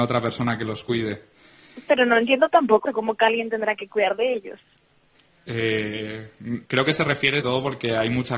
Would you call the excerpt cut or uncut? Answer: cut